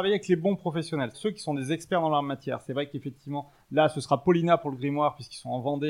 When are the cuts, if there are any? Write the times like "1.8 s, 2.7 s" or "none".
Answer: 1.1 s